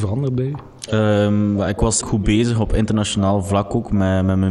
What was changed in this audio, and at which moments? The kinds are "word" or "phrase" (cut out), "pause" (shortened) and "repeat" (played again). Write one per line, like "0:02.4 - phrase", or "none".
0:02.0 - word